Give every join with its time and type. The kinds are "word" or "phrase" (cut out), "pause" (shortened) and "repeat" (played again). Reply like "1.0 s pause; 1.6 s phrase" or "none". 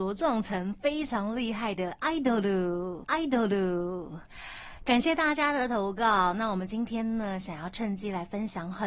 3.0 s repeat